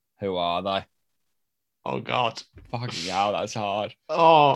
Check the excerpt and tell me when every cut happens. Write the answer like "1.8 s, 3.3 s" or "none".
none

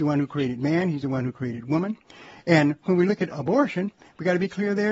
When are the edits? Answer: 3.3 s

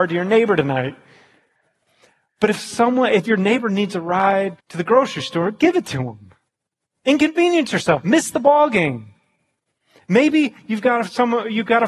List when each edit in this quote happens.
4.6 s

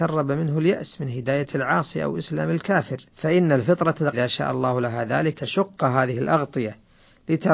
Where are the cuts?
3.1 s, 4.1 s, 5.4 s

